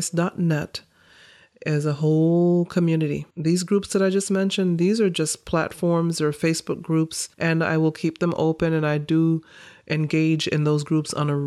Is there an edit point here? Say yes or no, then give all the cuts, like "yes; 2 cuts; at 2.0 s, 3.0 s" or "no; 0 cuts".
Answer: yes; 2 cuts; at 3.3 s, 7.3 s